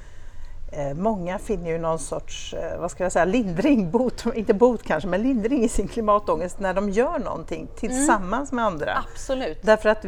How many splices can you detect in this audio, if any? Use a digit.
0